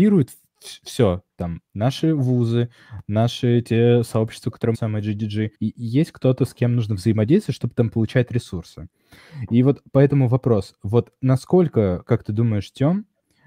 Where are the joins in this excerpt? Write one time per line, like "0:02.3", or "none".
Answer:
0:01.7
0:04.7
0:05.5